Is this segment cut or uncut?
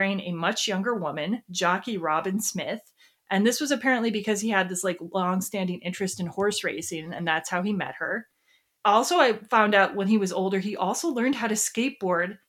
uncut